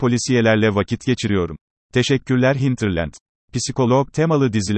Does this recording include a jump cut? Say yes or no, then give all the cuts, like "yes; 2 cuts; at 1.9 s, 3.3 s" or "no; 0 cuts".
yes; 2 cuts; at 1.7 s, 3.3 s